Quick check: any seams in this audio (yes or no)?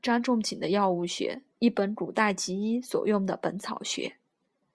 yes